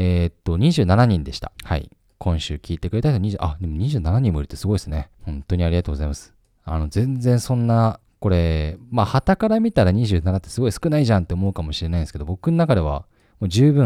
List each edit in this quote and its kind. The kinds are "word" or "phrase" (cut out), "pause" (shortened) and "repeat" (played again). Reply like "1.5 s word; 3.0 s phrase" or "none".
1.5 s pause; 5.1 s pause; 8.0 s pause